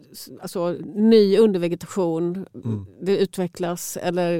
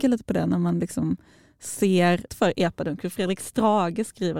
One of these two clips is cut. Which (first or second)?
second